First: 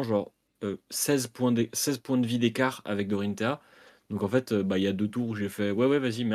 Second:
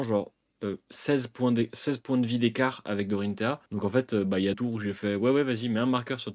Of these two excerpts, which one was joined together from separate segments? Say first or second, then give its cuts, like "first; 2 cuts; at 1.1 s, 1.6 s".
second; 2 cuts; at 3.7 s, 4.5 s